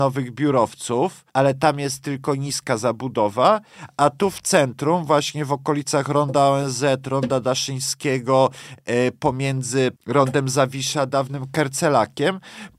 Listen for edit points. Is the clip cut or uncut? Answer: cut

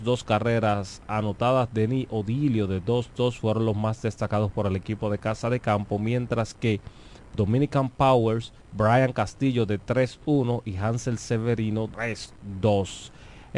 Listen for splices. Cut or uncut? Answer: cut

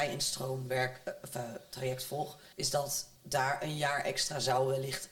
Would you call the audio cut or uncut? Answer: cut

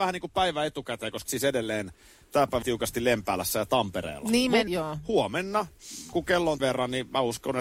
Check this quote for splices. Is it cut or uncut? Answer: cut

